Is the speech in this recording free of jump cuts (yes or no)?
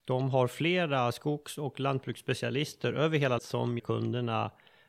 no